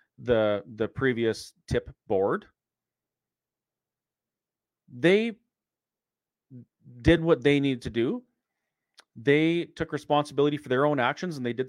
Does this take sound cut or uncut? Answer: uncut